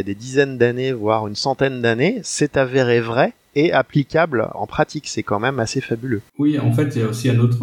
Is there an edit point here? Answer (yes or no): yes